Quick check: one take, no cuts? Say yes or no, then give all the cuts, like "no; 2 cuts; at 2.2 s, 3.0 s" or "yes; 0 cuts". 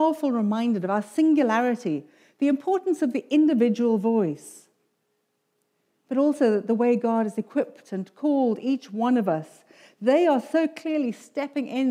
yes; 0 cuts